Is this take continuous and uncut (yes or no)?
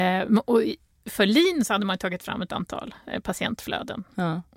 yes